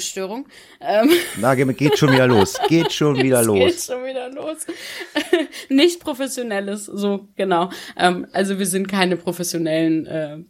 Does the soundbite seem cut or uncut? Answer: uncut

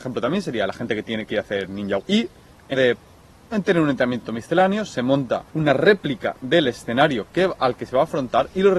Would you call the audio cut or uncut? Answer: cut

